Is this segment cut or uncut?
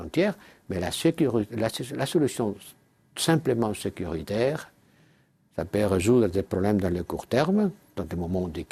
uncut